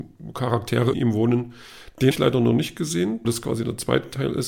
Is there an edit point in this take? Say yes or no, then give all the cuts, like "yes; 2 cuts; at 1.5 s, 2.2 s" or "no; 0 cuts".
yes; 3 cuts; at 0.9 s, 2.1 s, 3.2 s